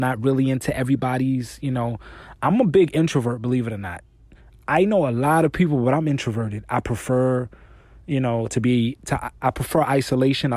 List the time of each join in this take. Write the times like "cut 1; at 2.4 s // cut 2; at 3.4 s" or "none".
none